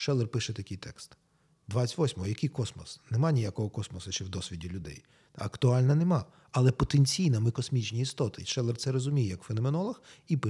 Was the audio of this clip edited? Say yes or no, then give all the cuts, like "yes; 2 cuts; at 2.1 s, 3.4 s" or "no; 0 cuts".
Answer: no; 0 cuts